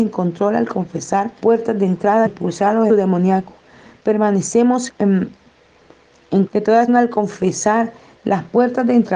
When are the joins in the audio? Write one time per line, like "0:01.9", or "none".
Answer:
0:01.4
0:02.3
0:02.9
0:04.9
0:06.5
0:06.9

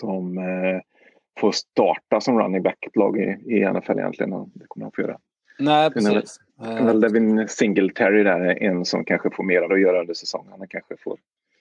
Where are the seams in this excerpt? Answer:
0:02.9
0:06.5
0:09.7

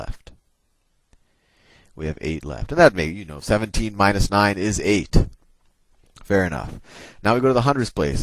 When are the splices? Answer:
none

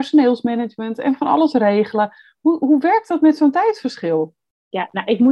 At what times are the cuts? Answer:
none

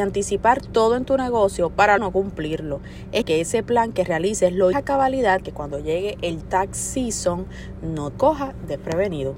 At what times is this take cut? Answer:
0:02.0
0:03.2
0:04.7
0:05.4
0:06.4
0:08.1

